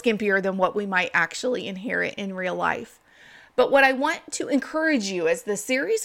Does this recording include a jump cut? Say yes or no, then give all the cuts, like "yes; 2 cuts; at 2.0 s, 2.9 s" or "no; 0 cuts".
no; 0 cuts